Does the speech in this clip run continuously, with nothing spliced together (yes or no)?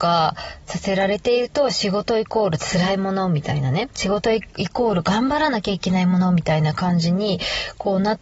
no